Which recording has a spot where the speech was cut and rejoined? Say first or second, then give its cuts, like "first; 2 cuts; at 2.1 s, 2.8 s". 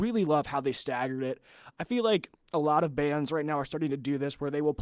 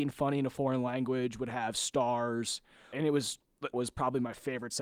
second; 2 cuts; at 2.9 s, 3.7 s